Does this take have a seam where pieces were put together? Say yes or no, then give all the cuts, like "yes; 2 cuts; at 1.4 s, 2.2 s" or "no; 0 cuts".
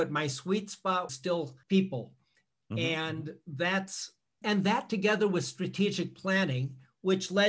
yes; 3 cuts; at 1.1 s, 1.6 s, 4.4 s